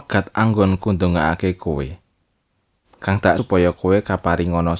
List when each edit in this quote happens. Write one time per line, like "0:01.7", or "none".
0:03.4

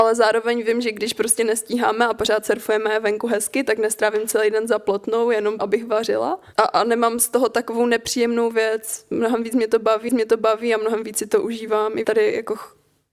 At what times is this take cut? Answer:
0:05.6
0:10.1
0:12.0

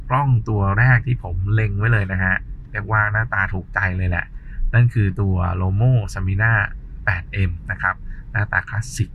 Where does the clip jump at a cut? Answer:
none

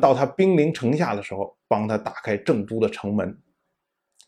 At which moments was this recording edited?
none

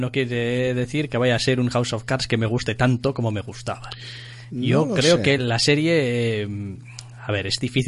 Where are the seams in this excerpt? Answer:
none

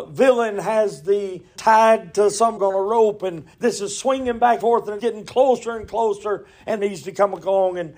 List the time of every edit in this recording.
0:01.6
0:02.6
0:03.5
0:04.6
0:05.0
0:06.8

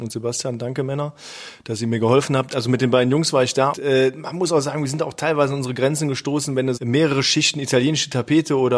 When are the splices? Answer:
0:03.7
0:06.8

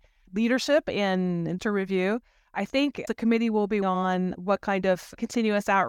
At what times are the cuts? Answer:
0:01.6
0:03.1
0:03.8

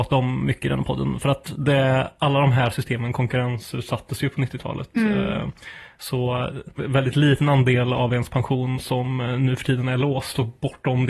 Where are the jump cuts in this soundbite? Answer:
0:06.8

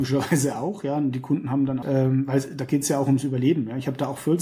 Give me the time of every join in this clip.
0:01.8

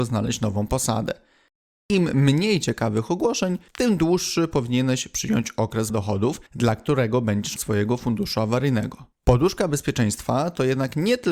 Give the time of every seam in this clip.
0:03.7
0:05.9
0:06.5
0:07.6
0:09.1

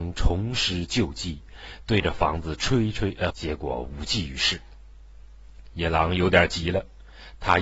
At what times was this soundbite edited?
0:03.3

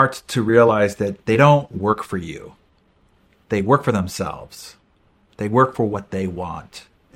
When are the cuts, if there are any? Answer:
none

